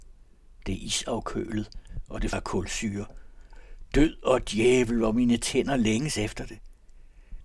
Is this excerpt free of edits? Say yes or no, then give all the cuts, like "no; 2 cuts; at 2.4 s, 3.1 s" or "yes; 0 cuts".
no; 1 cut; at 2.3 s